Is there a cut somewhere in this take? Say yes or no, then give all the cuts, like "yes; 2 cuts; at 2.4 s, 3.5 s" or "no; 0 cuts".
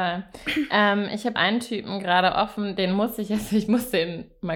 yes; 1 cut; at 1.4 s